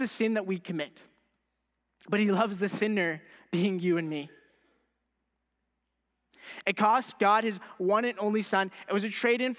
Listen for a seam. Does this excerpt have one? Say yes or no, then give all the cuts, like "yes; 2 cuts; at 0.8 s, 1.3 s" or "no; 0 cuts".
no; 0 cuts